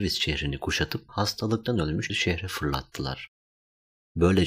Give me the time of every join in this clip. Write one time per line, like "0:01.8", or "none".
0:01.1
0:02.1